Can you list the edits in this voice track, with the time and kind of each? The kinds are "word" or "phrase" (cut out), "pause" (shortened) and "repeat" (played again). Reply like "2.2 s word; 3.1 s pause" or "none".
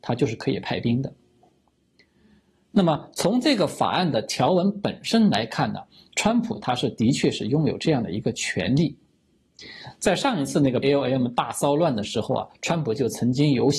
10.8 s word